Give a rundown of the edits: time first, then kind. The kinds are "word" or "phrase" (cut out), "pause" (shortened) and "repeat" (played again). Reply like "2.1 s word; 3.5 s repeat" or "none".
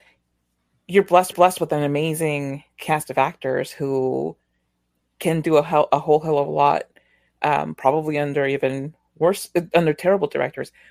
1.3 s repeat